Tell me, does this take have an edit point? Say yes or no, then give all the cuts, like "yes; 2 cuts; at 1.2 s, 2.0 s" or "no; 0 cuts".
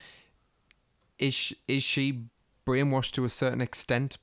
no; 0 cuts